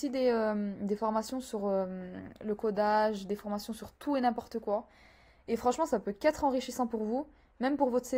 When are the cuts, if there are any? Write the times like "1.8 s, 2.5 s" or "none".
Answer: none